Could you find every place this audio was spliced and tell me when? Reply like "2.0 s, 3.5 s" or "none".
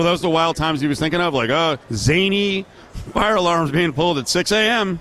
1.8 s